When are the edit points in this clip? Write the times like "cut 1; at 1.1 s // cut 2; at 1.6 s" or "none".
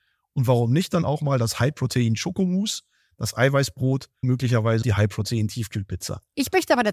cut 1; at 4.2 s // cut 2; at 4.8 s